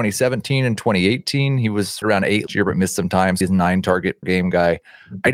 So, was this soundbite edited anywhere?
yes; 4 cuts; at 2.0 s, 2.5 s, 3.4 s, 4.2 s

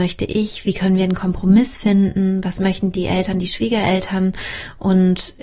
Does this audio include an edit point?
no; 0 cuts

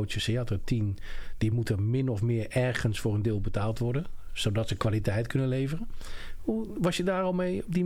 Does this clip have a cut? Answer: no; 0 cuts

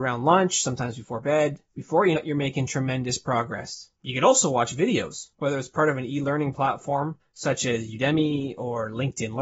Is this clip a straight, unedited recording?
no; 5 cuts; at 1.7 s, 2.2 s, 4.0 s, 5.3 s, 7.2 s

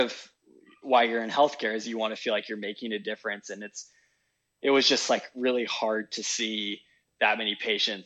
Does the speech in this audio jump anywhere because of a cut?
no; 0 cuts

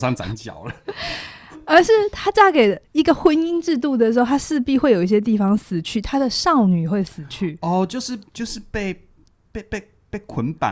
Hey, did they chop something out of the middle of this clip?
yes; 2 cuts; at 2.8 s, 8.3 s

